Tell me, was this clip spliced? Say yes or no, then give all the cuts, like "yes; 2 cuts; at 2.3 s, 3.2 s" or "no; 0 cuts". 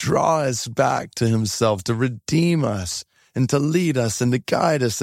no; 0 cuts